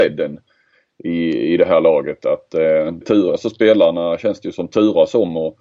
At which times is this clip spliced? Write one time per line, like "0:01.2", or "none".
0:03.0